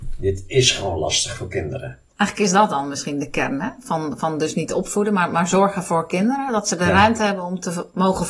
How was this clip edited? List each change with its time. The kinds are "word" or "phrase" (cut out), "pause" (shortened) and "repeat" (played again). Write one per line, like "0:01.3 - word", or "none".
0:02.1 - pause